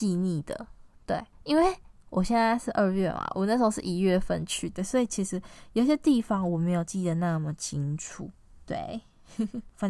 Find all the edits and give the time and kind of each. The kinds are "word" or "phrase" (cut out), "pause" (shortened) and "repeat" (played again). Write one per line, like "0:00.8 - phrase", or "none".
none